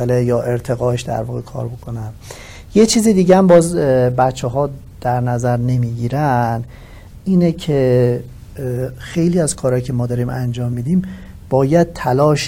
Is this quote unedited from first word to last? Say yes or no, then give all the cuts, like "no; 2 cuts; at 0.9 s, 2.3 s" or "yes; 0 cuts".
yes; 0 cuts